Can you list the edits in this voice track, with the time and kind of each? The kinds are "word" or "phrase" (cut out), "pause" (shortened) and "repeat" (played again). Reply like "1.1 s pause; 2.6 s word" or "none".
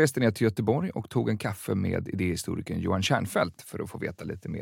none